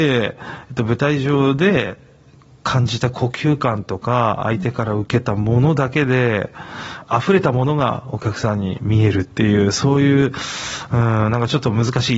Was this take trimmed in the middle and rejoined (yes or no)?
no